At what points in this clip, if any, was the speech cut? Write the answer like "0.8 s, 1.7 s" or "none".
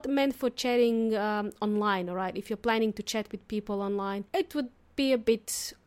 4.3 s